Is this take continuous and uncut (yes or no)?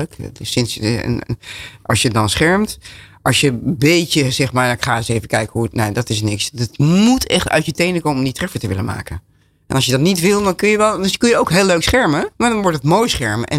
no